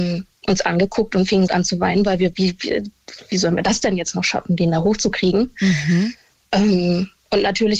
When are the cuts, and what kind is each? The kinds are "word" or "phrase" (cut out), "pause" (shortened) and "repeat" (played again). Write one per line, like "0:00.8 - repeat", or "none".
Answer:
0:01.5 - word
0:02.3 - word